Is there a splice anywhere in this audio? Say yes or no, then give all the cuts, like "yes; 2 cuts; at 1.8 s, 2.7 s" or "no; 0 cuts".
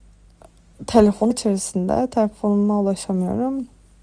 yes; 1 cut; at 1.3 s